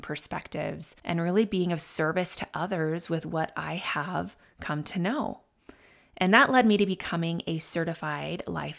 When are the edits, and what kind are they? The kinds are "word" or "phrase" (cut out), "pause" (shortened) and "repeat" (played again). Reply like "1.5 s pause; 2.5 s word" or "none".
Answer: none